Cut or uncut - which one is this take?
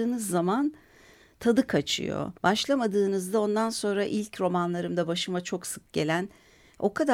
cut